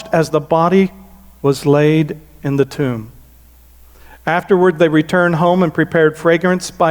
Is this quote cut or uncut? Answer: uncut